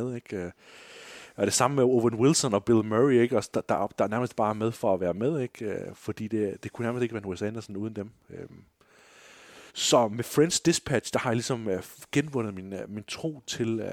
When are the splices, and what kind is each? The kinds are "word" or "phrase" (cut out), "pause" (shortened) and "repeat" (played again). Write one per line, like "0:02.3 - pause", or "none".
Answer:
0:09.7 - pause